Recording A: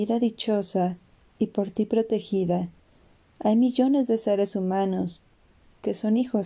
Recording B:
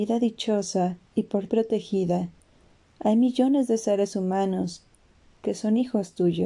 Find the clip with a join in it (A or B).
B